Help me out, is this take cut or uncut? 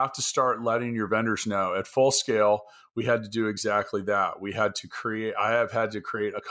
uncut